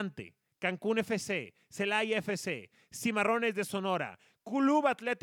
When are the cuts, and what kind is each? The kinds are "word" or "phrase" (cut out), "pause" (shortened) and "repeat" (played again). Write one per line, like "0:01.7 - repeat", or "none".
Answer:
none